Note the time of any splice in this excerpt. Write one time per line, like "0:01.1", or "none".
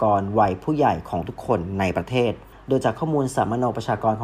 none